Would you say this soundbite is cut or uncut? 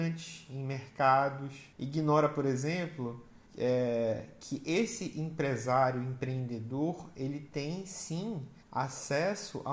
cut